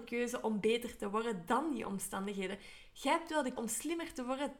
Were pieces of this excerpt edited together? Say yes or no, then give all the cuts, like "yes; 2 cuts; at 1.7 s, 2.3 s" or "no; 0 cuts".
yes; 1 cut; at 3.6 s